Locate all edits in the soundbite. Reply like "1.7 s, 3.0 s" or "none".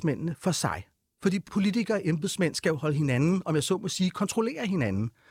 none